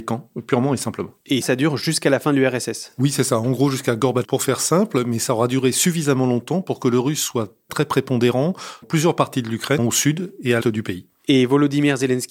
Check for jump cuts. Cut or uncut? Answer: cut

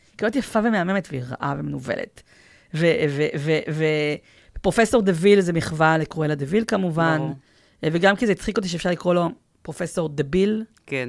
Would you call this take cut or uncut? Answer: uncut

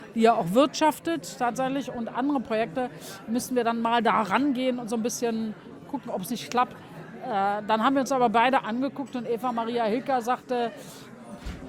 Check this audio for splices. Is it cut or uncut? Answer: uncut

